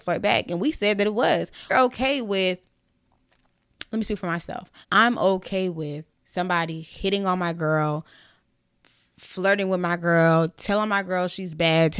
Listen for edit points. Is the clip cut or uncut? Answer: cut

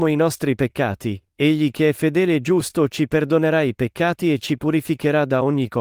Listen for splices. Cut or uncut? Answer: uncut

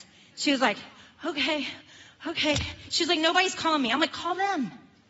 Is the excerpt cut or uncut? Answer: uncut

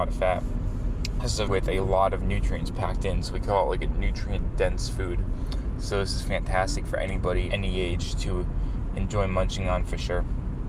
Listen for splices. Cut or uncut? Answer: cut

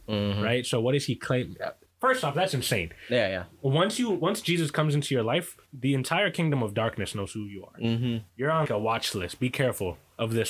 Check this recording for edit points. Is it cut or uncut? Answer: cut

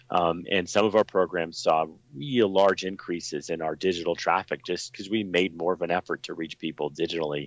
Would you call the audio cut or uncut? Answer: uncut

